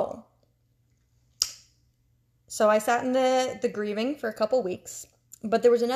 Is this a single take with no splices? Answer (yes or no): yes